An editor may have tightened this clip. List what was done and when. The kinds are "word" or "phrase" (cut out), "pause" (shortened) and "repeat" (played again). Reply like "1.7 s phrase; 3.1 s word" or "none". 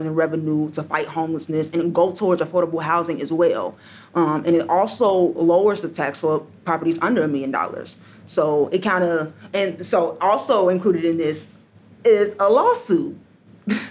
none